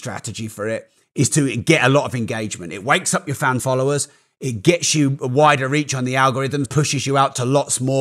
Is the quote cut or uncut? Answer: cut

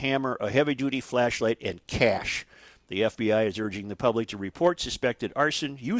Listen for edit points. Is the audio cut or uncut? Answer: uncut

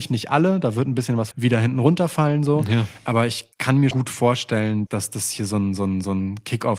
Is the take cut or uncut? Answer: cut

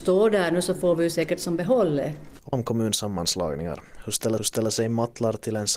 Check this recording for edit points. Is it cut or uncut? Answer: cut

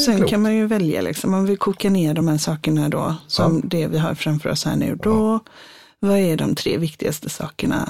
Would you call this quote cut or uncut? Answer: uncut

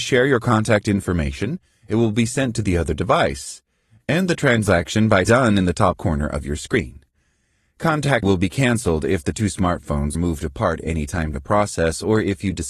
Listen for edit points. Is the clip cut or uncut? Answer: cut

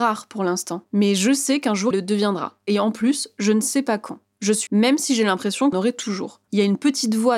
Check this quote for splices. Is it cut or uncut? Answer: cut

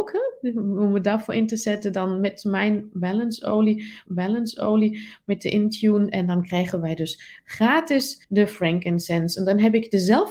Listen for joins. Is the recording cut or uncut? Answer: cut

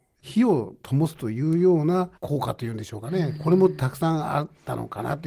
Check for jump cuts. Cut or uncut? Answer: cut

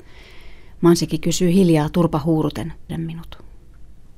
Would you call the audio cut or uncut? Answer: cut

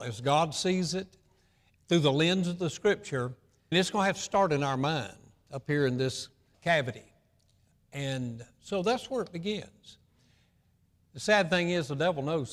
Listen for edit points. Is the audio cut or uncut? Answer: cut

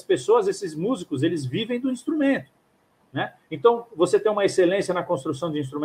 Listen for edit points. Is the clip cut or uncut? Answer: uncut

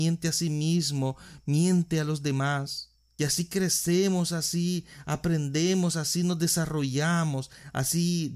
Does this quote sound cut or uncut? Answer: uncut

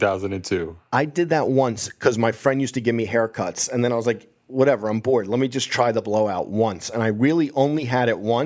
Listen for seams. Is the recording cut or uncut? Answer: uncut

